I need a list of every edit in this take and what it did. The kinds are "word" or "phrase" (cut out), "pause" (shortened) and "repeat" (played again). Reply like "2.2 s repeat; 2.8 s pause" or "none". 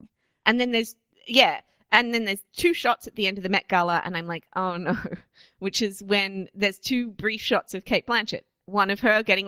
none